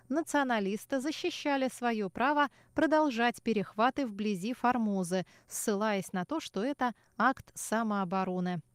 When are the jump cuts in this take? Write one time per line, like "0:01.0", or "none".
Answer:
none